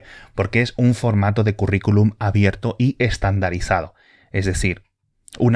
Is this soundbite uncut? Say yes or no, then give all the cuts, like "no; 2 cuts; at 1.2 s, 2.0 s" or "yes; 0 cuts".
yes; 0 cuts